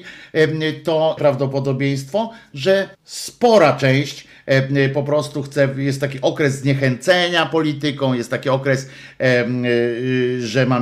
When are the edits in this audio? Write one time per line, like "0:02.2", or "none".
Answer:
0:01.2
0:02.9